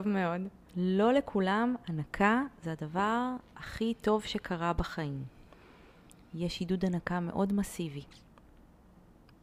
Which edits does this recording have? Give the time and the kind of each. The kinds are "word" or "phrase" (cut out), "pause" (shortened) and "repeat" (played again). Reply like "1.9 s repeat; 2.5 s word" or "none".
none